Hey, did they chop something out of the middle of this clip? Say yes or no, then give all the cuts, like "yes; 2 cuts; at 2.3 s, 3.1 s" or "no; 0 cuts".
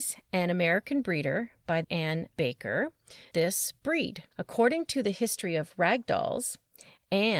yes; 3 cuts; at 1.8 s, 3.3 s, 4.3 s